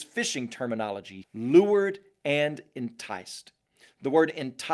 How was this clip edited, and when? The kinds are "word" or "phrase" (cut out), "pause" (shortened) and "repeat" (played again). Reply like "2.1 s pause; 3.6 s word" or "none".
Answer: 1.2 s word